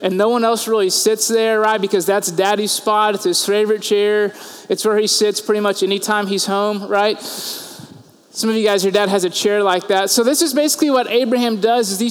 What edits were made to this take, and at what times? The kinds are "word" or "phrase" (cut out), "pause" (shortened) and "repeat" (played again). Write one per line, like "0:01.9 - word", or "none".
none